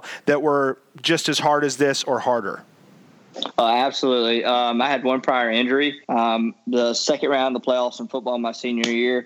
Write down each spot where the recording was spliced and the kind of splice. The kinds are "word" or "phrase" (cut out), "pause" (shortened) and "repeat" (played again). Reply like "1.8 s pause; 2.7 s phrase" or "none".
6.0 s pause